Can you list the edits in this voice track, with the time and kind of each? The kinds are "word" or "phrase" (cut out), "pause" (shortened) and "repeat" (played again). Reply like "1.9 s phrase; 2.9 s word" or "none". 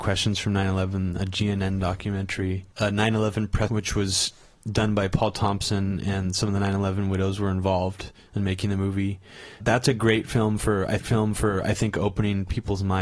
2.7 s pause; 3.7 s phrase; 4.5 s word; 9.6 s word; 11.0 s repeat